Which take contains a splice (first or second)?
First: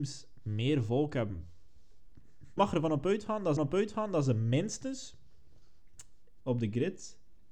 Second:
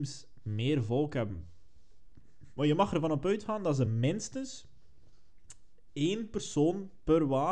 first